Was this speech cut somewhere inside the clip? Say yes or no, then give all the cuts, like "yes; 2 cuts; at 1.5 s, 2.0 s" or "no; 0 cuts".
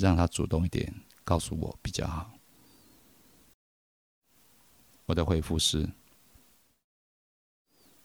no; 0 cuts